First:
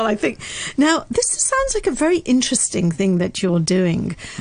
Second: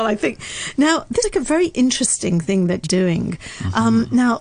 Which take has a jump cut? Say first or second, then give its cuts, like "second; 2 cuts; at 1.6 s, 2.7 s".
second; 2 cuts; at 1.2 s, 2.8 s